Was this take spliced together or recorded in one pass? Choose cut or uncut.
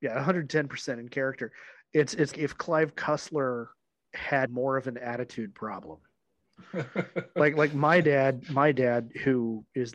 cut